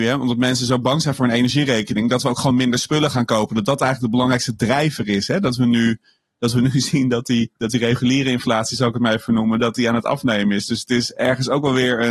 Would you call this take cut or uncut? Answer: uncut